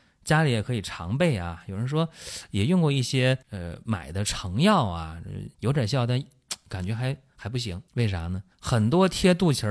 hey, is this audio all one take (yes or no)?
no